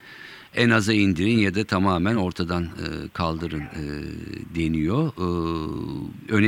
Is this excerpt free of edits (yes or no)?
yes